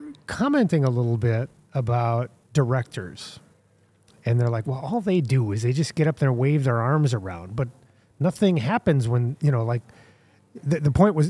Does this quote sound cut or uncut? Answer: uncut